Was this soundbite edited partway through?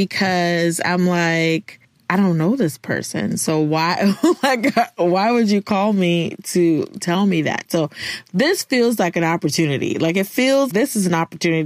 yes; 2 cuts; at 7.0 s, 10.7 s

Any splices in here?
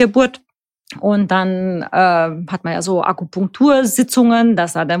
no; 0 cuts

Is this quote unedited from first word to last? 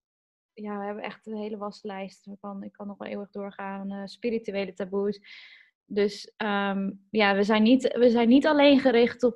yes; 0 cuts

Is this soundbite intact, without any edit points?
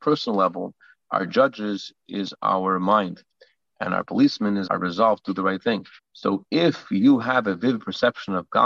no; 2 cuts; at 4.7 s, 6.0 s

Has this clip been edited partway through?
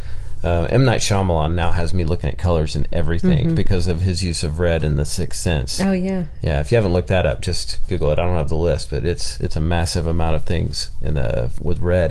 yes; 1 cut; at 7.9 s

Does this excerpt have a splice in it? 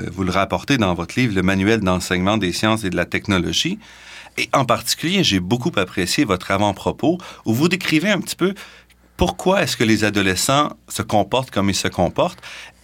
no; 0 cuts

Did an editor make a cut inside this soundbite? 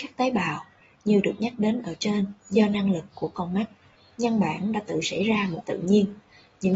yes; 2 cuts; at 2.4 s, 5.6 s

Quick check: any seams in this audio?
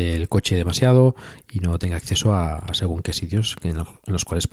no; 0 cuts

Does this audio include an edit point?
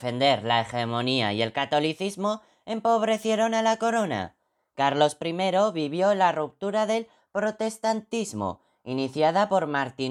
no; 0 cuts

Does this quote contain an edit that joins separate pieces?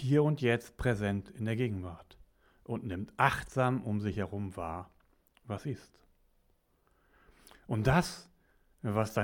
no; 0 cuts

